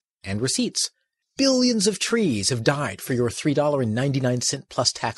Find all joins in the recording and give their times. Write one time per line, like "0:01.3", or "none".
none